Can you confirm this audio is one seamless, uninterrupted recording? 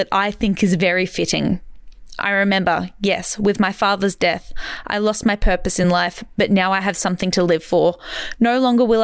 yes; 0 cuts

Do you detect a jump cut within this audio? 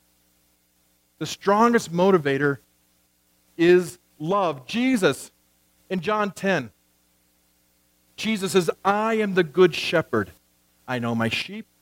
no; 0 cuts

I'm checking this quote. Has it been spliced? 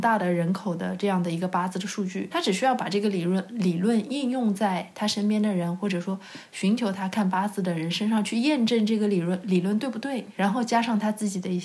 yes; 2 cuts; at 2.3 s, 10.4 s

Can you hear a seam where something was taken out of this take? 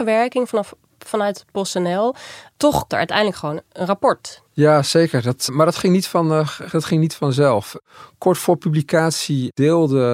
yes; 3 cuts; at 2.9 s, 4.5 s, 5.5 s

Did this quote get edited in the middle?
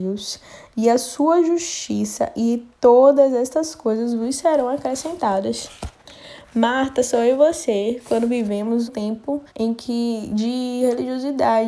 yes; 2 cuts; at 8.9 s, 9.5 s

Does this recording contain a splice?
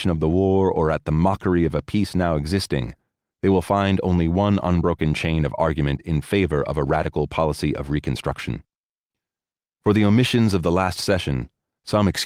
no; 0 cuts

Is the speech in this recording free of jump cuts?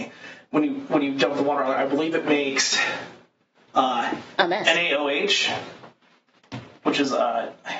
yes; 0 cuts

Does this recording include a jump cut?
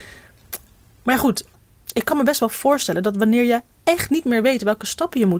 no; 0 cuts

